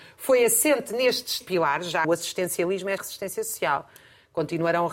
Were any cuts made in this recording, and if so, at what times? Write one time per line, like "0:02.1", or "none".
0:01.4
0:02.0
0:03.0

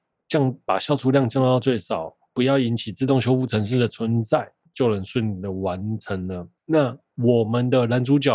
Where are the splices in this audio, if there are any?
0:04.7
0:06.6

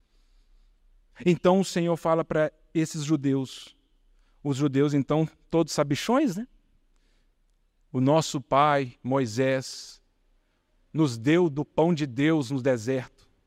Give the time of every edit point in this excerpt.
none

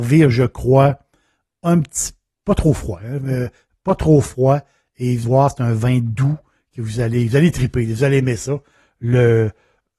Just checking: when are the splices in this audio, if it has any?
0:05.2

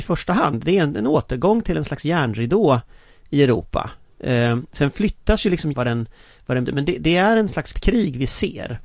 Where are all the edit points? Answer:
0:05.7
0:06.7
0:07.7

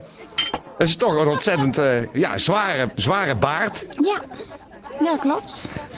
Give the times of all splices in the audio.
none

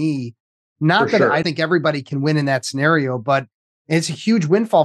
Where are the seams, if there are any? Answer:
0:01.4

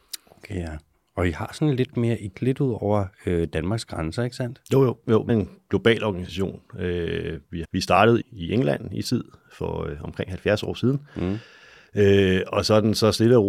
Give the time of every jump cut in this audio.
0:02.3
0:05.3
0:07.6
0:08.2
0:09.0

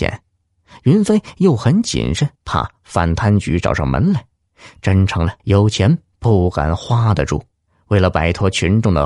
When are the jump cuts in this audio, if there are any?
0:02.4
0:05.4
0:07.7

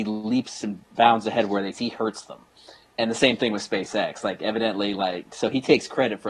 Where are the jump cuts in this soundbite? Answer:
0:01.7

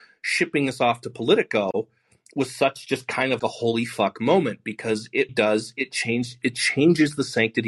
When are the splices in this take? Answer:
0:03.4
0:05.3

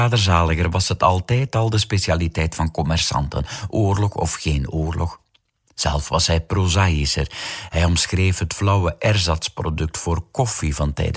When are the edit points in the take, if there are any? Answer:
none

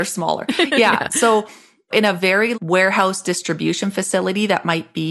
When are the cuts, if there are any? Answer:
0:02.5

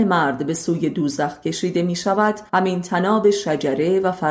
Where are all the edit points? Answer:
0:02.5

